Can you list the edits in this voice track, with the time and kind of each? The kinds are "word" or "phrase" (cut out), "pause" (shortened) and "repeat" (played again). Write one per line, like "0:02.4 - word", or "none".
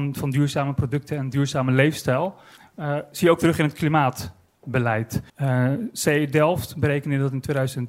0:02.6 - pause
0:05.3 - pause

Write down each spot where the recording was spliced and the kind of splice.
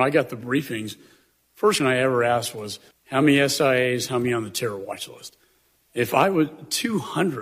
0:01.8 - word
0:02.9 - pause

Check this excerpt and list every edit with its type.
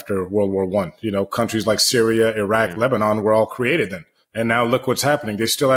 0:04.2 - pause

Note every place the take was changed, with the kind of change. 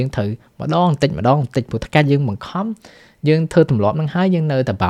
none

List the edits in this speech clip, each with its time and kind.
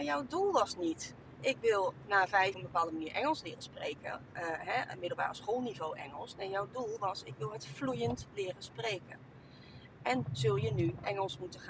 0:02.5 - phrase
0:10.3 - word

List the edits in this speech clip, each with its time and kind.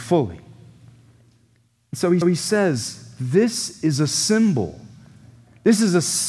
0:02.2 - repeat

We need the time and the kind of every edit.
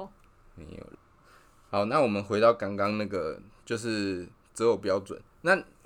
none

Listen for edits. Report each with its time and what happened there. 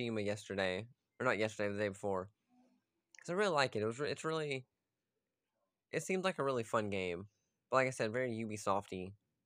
none

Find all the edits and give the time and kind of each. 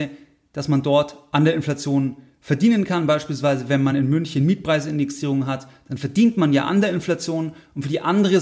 none

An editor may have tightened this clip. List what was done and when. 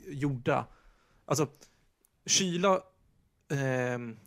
none

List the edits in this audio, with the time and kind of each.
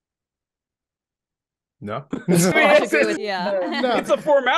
0:02.1 - word
0:02.5 - word
0:03.2 - word

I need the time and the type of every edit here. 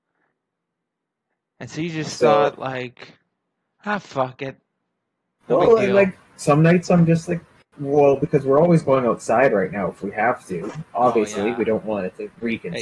none

